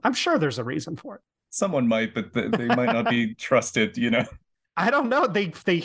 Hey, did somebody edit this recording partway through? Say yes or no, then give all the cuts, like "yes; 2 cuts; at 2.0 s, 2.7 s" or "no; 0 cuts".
no; 0 cuts